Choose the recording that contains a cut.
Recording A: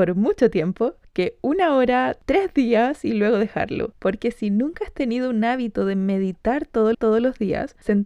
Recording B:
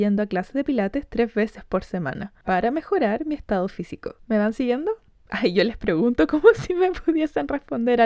A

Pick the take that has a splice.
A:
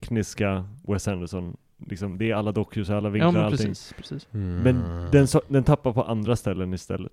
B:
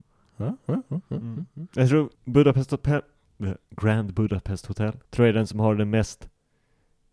B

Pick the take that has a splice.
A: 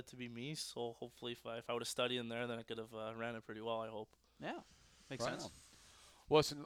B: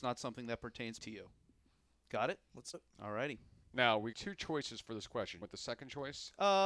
B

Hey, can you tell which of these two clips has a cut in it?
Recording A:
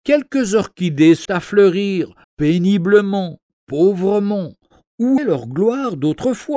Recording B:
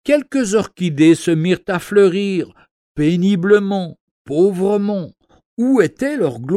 A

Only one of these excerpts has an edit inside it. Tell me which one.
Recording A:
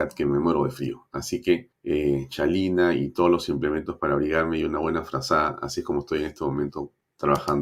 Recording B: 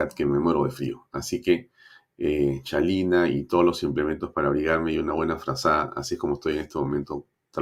A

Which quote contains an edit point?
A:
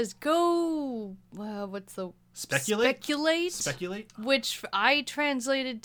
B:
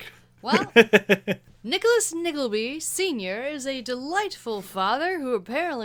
A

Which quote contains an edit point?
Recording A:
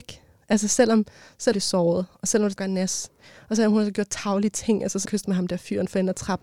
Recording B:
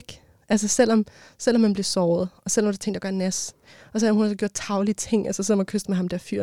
A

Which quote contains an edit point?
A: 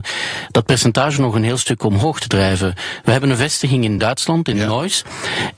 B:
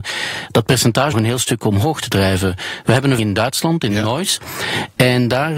B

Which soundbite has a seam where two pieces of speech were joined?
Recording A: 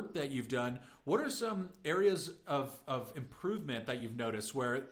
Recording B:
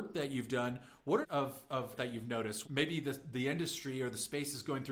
B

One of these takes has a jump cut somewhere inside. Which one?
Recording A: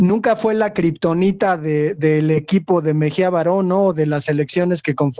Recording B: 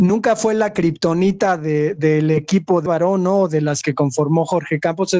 B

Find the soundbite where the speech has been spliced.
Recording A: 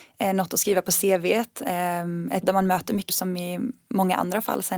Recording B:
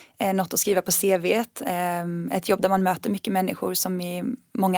A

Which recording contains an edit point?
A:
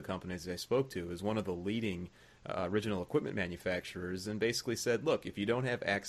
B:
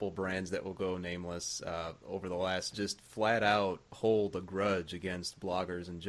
B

